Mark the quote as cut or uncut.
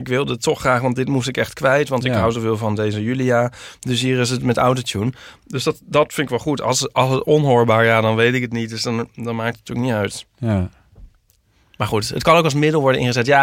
uncut